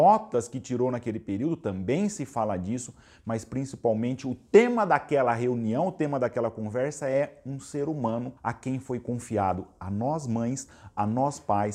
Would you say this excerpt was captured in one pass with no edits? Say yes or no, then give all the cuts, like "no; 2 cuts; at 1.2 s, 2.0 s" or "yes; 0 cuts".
no; 1 cut; at 8.4 s